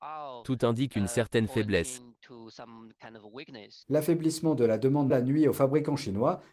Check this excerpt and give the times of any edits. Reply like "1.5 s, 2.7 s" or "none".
3.8 s, 5.1 s

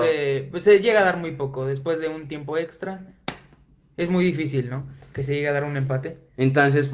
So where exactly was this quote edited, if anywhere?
none

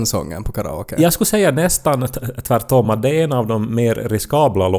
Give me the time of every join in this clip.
none

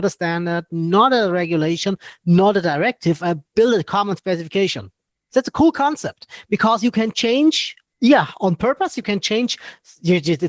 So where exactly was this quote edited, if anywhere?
7.9 s

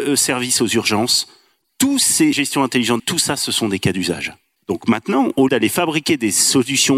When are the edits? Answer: 2.3 s, 3.0 s, 5.5 s

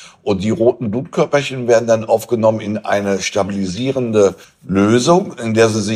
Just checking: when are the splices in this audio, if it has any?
4.4 s

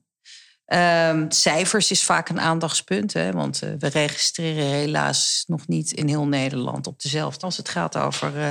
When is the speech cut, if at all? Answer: 7.4 s

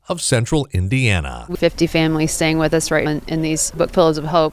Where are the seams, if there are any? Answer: 1.5 s, 3.1 s

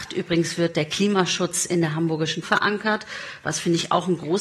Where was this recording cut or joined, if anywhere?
2.4 s

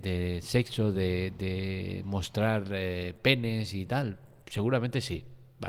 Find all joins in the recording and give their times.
none

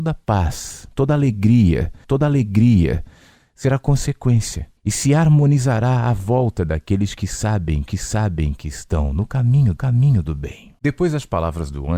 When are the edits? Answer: 2.0 s, 4.8 s, 7.9 s, 9.8 s, 10.8 s

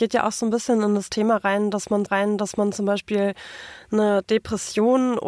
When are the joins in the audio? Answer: 2.1 s

